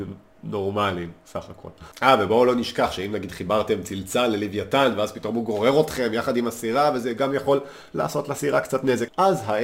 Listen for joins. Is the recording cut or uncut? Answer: cut